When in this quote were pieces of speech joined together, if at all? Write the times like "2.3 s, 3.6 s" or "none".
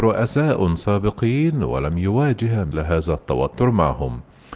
2.7 s